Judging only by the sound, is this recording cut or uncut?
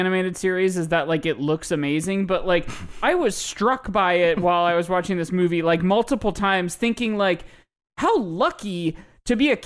uncut